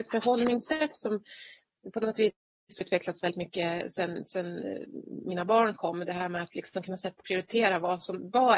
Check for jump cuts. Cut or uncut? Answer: cut